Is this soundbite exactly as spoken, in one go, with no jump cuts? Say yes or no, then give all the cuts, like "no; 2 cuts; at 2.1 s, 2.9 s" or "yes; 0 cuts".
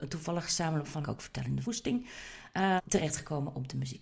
no; 3 cuts; at 1.0 s, 1.6 s, 2.8 s